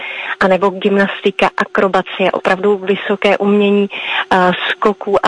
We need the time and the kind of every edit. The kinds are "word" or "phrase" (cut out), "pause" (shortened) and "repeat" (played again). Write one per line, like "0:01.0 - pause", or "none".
none